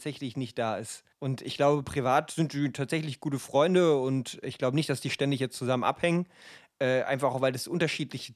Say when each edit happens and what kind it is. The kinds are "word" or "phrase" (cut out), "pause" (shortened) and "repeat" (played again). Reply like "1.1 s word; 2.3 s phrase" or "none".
1.1 s pause